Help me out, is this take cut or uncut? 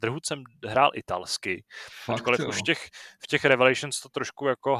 uncut